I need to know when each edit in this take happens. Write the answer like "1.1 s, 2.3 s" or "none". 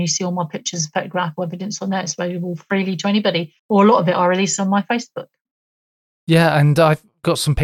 1.4 s, 3.6 s